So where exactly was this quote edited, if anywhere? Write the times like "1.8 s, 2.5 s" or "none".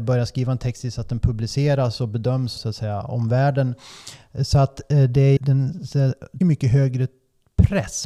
2.6 s, 5.4 s, 6.4 s